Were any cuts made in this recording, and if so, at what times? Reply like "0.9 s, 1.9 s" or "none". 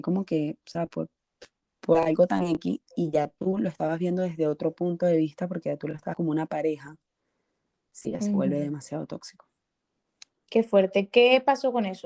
6.1 s